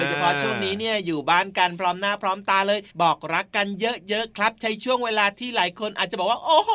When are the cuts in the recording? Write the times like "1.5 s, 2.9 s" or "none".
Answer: 2.9 s